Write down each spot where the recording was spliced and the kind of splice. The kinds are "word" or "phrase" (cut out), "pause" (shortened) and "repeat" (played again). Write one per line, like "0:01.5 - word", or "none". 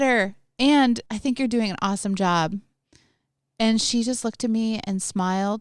0:01.1 - pause